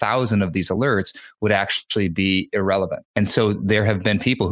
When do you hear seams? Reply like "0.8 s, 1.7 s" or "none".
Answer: 3.1 s